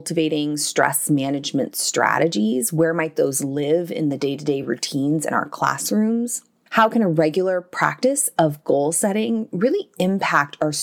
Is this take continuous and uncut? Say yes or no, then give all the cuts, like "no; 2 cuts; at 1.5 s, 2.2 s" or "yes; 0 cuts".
yes; 0 cuts